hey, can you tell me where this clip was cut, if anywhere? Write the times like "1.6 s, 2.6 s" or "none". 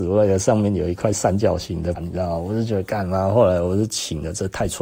2.0 s